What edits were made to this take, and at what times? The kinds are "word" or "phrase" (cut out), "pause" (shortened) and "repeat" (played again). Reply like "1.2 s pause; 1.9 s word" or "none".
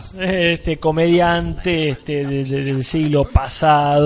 none